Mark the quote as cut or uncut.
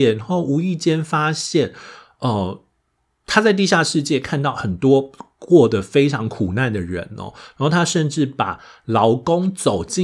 uncut